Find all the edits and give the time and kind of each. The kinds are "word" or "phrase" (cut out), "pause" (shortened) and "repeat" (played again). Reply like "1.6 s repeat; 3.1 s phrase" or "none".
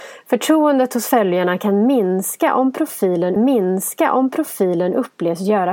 3.4 s repeat